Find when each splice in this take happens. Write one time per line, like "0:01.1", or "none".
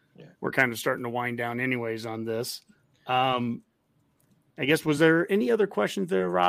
none